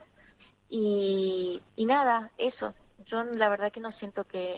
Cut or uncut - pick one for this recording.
cut